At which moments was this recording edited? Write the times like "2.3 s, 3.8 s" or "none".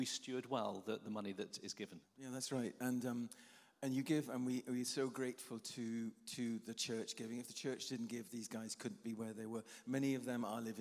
1.6 s, 2.0 s